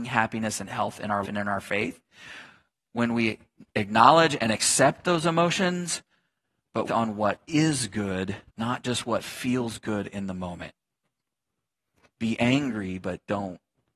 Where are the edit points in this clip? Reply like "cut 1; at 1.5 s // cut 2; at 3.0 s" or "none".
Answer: cut 1; at 1.2 s // cut 2; at 6.8 s // cut 3; at 8.5 s

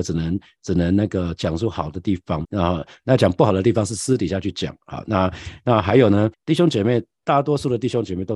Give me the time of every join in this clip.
cut 1; at 2.4 s // cut 2; at 6.3 s

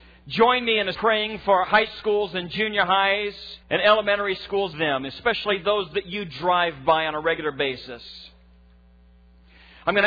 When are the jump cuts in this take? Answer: cut 1; at 0.9 s // cut 2; at 1.6 s // cut 3; at 3.6 s // cut 4; at 4.7 s

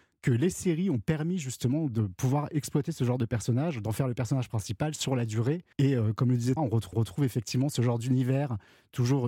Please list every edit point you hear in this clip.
cut 1; at 5.7 s // cut 2; at 6.6 s // cut 3; at 6.9 s

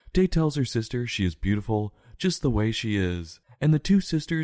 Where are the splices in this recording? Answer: cut 1; at 3.4 s

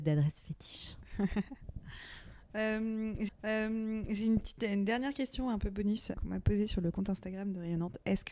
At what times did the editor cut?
cut 1; at 3.3 s // cut 2; at 6.1 s

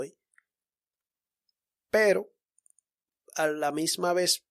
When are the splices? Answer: none

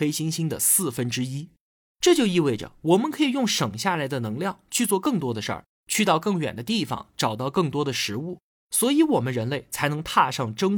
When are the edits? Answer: none

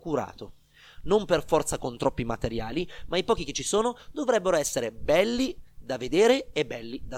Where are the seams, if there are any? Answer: none

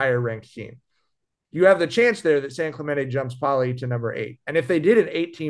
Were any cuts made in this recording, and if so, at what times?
none

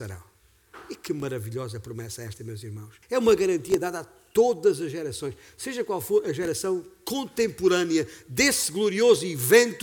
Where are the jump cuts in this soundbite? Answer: cut 1; at 3.0 s

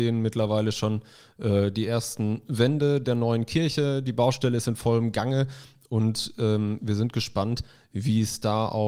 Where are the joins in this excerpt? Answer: none

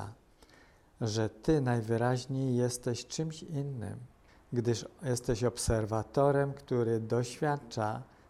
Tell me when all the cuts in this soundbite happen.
cut 1; at 4.3 s

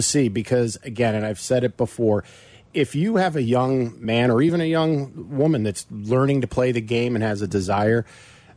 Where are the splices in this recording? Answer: none

